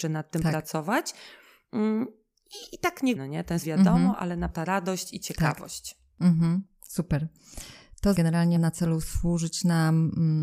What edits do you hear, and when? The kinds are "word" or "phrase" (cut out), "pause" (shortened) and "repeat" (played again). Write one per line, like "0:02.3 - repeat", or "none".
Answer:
0:03.2 - word
0:03.6 - word
0:04.5 - word
0:08.1 - word
0:08.6 - word